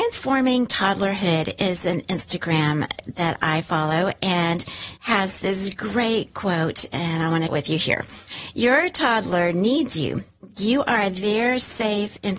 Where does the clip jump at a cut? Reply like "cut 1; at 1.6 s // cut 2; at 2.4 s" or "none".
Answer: cut 1; at 5.0 s // cut 2; at 7.5 s